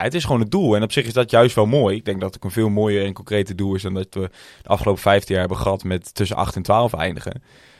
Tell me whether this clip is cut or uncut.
uncut